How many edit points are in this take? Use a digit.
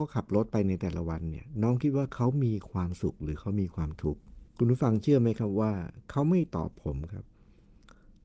1